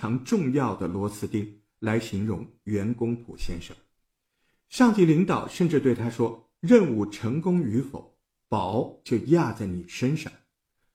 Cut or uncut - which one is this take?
uncut